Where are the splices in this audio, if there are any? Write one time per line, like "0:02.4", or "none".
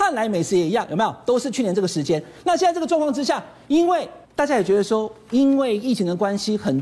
0:04.2

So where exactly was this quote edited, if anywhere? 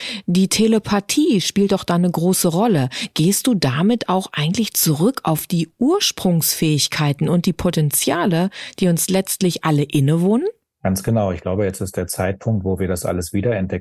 none

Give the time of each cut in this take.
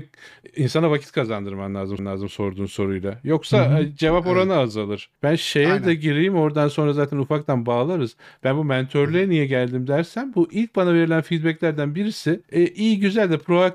0:02.0
0:05.1
0:12.4

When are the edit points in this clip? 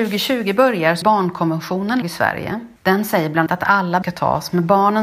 0:01.0
0:02.0
0:02.8
0:03.5
0:04.0

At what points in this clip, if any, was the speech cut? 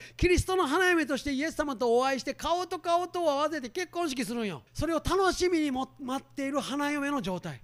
0:04.7

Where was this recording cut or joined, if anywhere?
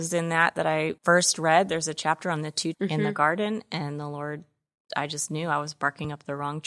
0:01.0
0:02.7
0:04.9

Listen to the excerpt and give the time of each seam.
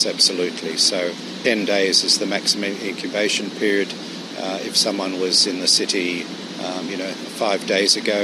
0:01.4

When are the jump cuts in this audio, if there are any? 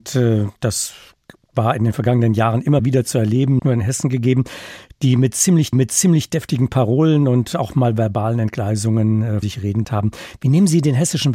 0:02.8
0:03.6
0:05.7
0:09.4
0:09.8

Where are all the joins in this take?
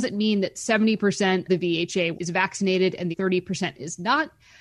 0:01.5
0:02.1
0:03.1

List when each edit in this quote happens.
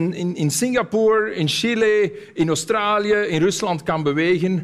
none

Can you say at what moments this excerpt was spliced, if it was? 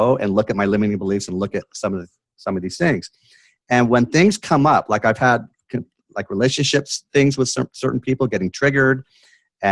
none

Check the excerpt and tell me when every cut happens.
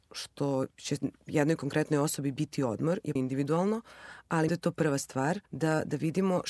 0:03.2
0:04.5
0:05.5

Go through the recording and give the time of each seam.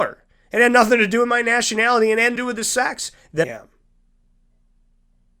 0:02.4
0:03.4

